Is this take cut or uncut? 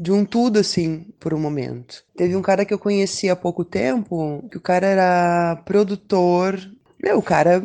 cut